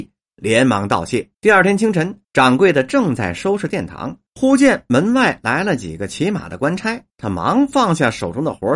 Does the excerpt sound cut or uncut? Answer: cut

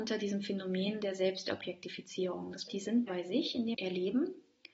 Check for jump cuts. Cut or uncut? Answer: cut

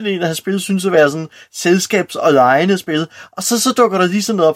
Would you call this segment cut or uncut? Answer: uncut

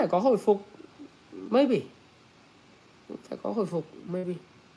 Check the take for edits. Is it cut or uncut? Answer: uncut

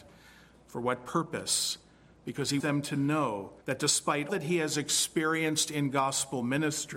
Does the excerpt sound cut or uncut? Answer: cut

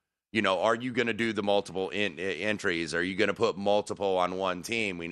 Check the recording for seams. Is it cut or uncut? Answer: uncut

